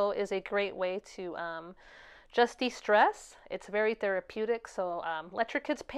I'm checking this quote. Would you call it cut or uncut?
uncut